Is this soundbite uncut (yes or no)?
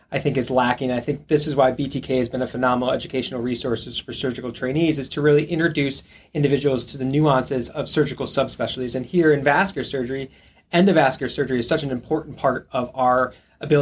yes